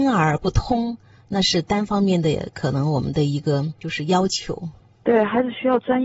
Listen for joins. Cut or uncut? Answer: uncut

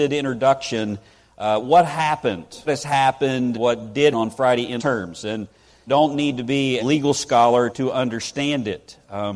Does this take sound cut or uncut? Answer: cut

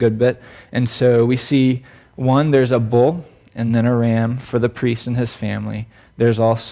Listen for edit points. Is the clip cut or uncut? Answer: uncut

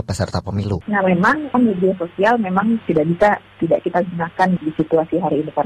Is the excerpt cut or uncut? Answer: uncut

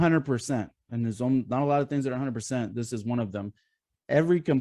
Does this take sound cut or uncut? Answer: uncut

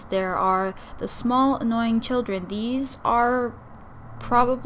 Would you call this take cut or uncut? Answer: uncut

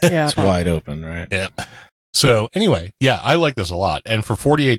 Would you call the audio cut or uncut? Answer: uncut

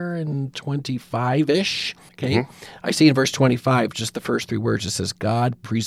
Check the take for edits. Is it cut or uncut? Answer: cut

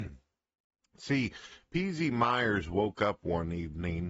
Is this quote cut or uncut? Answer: uncut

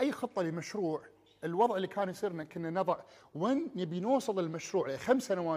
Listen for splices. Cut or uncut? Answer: uncut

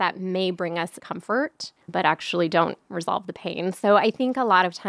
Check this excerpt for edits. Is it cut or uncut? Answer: cut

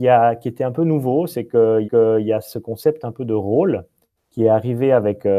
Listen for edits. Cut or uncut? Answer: cut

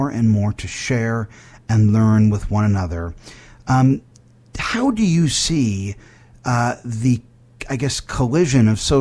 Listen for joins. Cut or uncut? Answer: uncut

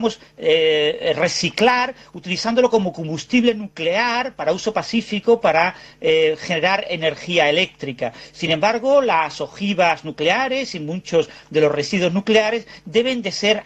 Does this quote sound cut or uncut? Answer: uncut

